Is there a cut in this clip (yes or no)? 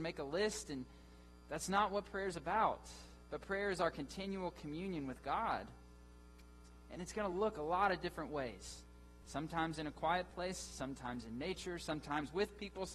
no